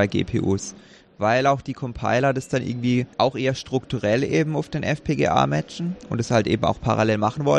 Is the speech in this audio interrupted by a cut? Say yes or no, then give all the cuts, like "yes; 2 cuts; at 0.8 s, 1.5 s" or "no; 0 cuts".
yes; 1 cut; at 3.1 s